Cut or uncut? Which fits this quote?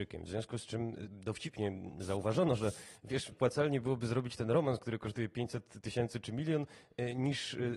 cut